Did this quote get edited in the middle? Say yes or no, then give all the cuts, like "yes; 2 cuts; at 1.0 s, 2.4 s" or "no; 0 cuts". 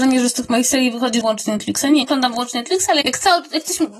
yes; 3 cuts; at 1.2 s, 2.0 s, 3.0 s